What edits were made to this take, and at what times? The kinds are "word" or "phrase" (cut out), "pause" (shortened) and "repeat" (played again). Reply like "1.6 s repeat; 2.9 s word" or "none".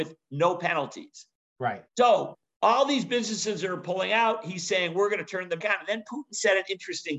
1.9 s pause; 5.6 s word